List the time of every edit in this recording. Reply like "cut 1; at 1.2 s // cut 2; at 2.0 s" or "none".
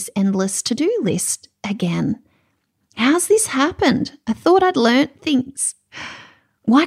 none